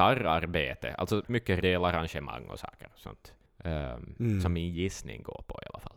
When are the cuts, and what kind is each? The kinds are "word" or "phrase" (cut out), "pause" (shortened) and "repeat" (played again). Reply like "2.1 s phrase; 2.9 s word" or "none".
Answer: 1.2 s word; 1.6 s phrase; 3.5 s pause